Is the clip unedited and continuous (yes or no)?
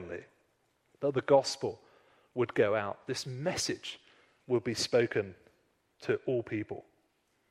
yes